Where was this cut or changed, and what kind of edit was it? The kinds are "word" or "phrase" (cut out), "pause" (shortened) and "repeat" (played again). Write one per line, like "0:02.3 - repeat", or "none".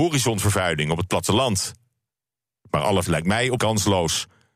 0:03.1 - word
0:03.6 - word